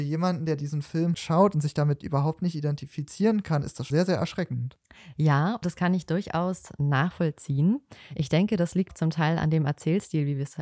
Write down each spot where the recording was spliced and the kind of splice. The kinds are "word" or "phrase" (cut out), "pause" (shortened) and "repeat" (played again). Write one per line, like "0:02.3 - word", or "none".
0:01.1 - word
0:03.9 - word
0:05.6 - word
0:08.9 - word